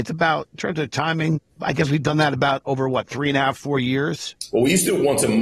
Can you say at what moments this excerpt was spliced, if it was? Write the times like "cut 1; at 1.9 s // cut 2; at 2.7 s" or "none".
cut 1; at 1.5 s